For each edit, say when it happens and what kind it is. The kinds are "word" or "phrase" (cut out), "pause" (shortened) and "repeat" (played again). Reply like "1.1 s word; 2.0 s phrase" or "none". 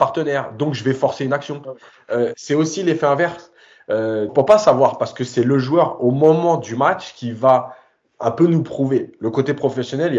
4.3 s phrase